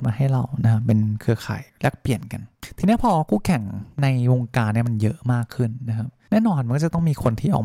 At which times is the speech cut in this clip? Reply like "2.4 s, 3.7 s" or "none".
1.7 s, 3.9 s